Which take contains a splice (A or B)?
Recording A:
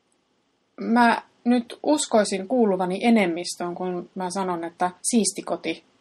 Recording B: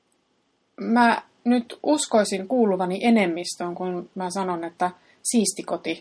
A